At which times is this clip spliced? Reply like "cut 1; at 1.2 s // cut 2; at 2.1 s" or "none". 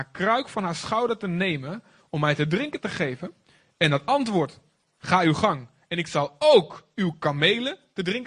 none